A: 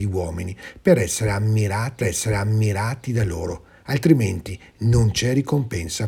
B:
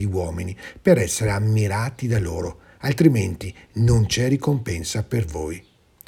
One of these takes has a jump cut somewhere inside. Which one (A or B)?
A